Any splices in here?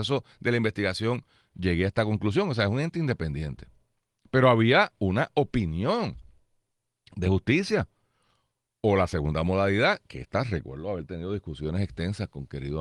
no; 0 cuts

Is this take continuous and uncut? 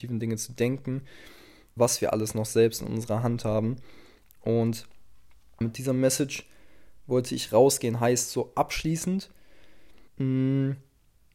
no; 3 cuts; at 1.8 s, 5.6 s, 10.1 s

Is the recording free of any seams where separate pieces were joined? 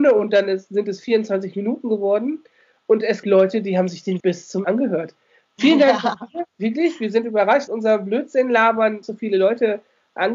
no; 6 cuts; at 3.2 s, 4.2 s, 4.6 s, 6.5 s, 7.7 s, 9.0 s

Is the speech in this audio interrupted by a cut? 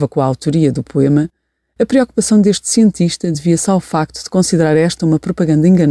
no; 0 cuts

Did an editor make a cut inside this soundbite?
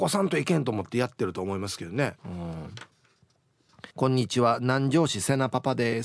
yes; 2 cuts; at 2.2 s, 3.9 s

